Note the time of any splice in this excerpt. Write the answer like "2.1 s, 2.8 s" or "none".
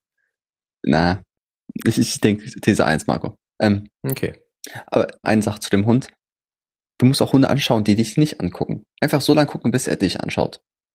3.5 s, 5.2 s